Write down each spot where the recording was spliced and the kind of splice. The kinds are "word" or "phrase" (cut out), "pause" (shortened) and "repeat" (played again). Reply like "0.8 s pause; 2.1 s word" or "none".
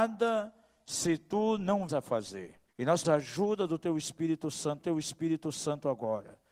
1.9 s word; 2.7 s pause; 3.0 s word; 4.8 s repeat